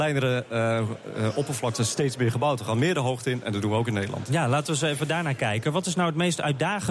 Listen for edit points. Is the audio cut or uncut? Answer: uncut